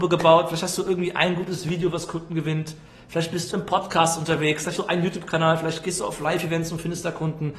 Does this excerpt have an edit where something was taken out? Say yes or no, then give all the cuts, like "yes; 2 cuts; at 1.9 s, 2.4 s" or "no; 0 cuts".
yes; 2 cuts; at 3.5 s, 4.8 s